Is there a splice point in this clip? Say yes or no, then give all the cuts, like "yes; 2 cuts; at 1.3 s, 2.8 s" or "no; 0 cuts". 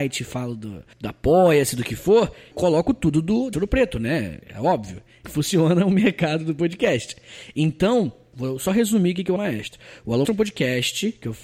yes; 8 cuts; at 0.9 s, 2.5 s, 3.5 s, 4.4 s, 5.2 s, 8.3 s, 9.4 s, 10.2 s